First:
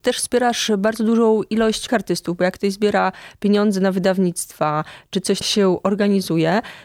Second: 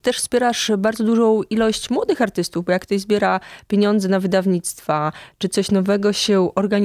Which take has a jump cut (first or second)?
first